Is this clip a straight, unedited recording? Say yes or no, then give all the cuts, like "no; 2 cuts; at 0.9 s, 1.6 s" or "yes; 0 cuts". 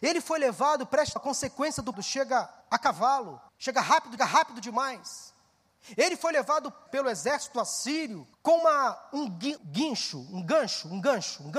no; 8 cuts; at 1.2 s, 1.9 s, 2.6 s, 3.5 s, 4.2 s, 6.9 s, 8.3 s, 9.6 s